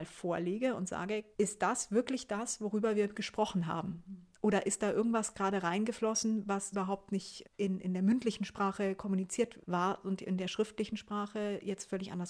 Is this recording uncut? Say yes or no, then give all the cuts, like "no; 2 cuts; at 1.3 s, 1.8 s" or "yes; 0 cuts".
no; 4 cuts; at 1.3 s, 6.7 s, 7.4 s, 9.6 s